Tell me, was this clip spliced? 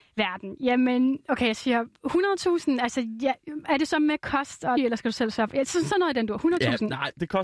yes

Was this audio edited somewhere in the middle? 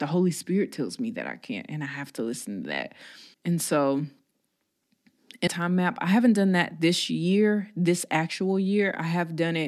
yes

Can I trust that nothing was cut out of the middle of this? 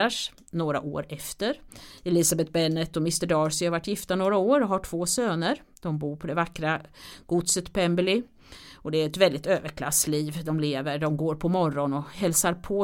yes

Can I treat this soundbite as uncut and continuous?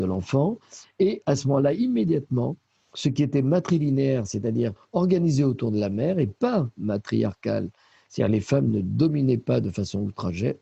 yes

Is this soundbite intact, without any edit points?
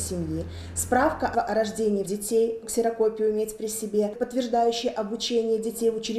no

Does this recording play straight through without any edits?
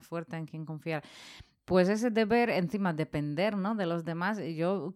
yes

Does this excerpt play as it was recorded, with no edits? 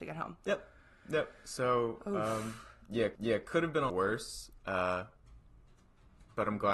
no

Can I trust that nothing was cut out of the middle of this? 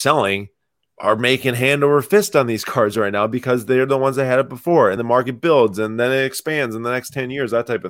no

